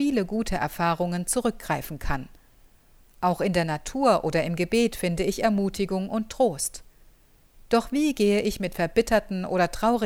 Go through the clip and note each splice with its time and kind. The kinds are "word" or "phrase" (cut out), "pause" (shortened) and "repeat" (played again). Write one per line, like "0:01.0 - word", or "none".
none